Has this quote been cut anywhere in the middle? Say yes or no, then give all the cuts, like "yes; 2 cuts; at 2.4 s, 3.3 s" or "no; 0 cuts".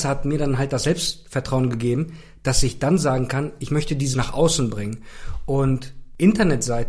yes; 1 cut; at 4.1 s